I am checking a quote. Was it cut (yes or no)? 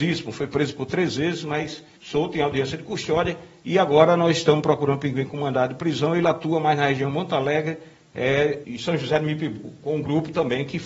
yes